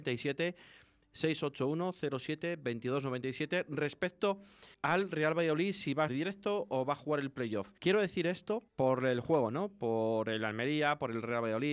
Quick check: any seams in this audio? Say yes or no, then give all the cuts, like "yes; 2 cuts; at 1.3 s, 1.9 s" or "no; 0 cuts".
yes; 4 cuts; at 4.7 s, 6.1 s, 7.8 s, 8.7 s